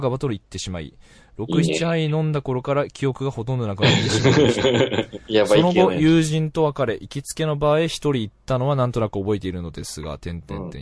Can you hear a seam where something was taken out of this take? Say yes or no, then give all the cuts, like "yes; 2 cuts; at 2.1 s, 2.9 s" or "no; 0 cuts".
no; 0 cuts